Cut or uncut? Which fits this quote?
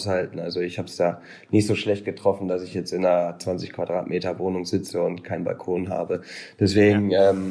uncut